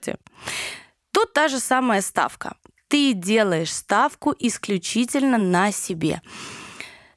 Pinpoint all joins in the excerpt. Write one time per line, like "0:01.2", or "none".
none